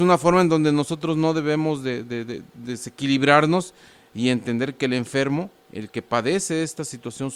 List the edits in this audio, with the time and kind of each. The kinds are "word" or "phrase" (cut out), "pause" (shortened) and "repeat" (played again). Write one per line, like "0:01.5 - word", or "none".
none